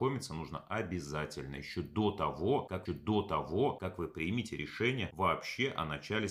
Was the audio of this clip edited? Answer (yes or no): yes